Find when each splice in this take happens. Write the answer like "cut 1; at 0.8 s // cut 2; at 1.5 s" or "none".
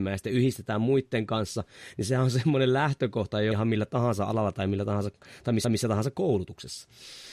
cut 1; at 3.5 s // cut 2; at 5.6 s

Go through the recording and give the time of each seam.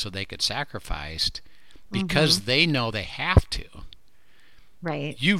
none

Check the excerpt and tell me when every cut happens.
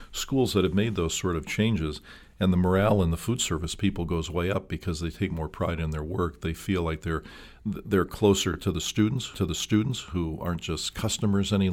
cut 1; at 9.3 s

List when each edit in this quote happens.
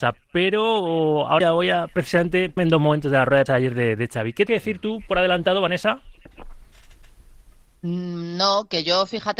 cut 1; at 1.4 s // cut 2; at 2.6 s // cut 3; at 3.5 s // cut 4; at 4.5 s

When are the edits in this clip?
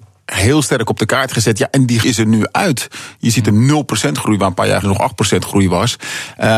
cut 1; at 2.0 s // cut 2; at 4.8 s

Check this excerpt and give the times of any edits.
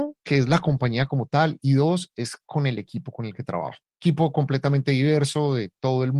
none

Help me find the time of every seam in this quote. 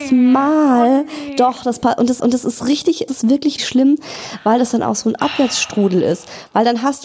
cut 1; at 2.2 s // cut 2; at 3.1 s // cut 3; at 3.6 s

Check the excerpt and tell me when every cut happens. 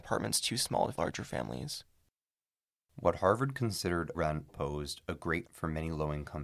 cut 1; at 0.9 s // cut 2; at 4.1 s // cut 3; at 4.5 s // cut 4; at 5.4 s

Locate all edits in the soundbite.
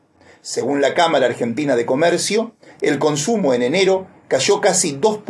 none

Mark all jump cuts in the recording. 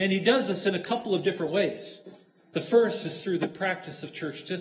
none

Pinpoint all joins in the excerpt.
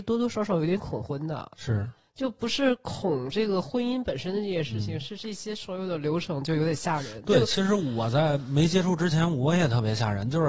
none

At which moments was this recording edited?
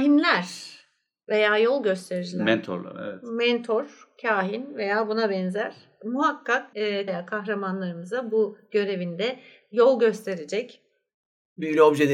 cut 1; at 6.7 s // cut 2; at 7.1 s

